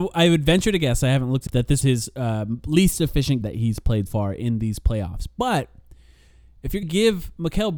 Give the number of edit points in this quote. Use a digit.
5